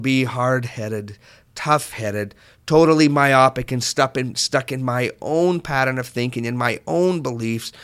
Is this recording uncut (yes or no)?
yes